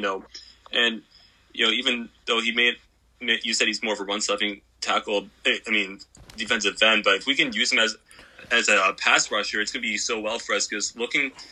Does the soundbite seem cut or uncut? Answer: uncut